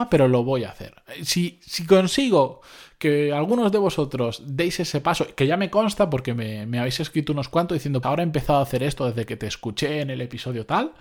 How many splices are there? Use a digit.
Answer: 1